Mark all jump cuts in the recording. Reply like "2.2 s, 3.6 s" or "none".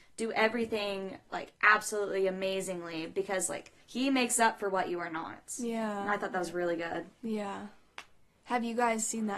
3.8 s